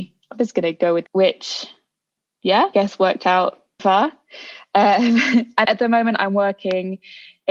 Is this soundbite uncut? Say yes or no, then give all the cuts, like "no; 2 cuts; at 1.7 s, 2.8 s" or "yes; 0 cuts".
no; 4 cuts; at 1.1 s, 2.7 s, 3.8 s, 5.6 s